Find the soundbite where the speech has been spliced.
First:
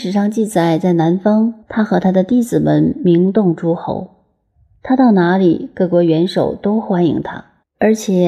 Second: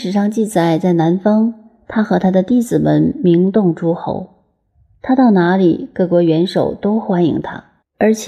first; 1 cut; at 1.6 s

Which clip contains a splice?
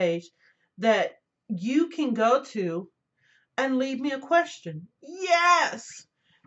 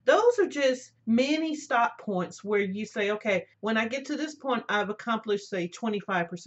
second; 2 cuts; at 1.0 s, 3.5 s

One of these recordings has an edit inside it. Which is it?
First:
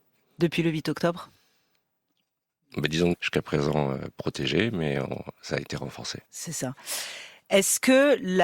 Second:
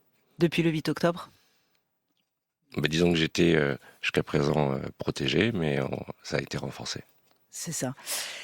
first; 2 cuts; at 3.1 s, 6.2 s

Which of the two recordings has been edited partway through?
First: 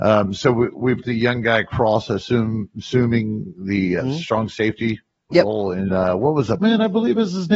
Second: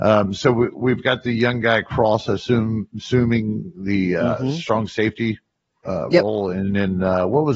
first; 5 cuts; at 1.0 s, 4.0 s, 5.3 s, 5.9 s, 6.6 s

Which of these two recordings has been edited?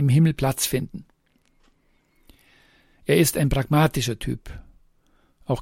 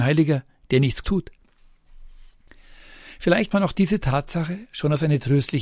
second; 2 cuts; at 1.0 s, 3.5 s

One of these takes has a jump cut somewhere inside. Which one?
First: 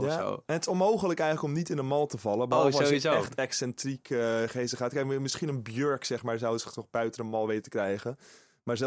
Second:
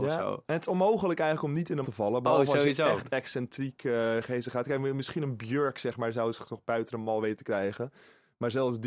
second; 1 cut; at 1.8 s

